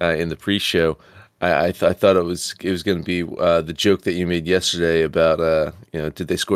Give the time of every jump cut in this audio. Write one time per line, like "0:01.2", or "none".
none